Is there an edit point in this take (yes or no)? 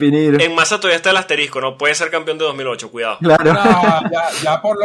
no